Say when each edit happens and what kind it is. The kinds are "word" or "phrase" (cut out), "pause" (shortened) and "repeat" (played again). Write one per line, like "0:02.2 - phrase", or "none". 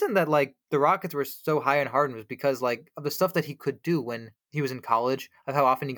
none